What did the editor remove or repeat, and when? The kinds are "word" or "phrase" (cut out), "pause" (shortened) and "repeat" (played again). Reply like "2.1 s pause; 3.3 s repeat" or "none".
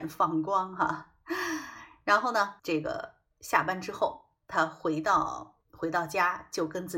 2.6 s pause; 5.6 s pause